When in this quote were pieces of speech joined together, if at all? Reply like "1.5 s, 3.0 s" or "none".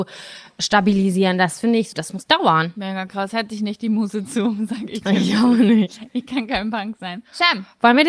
1.9 s